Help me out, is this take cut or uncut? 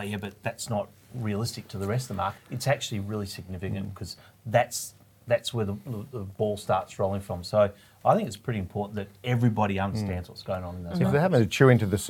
cut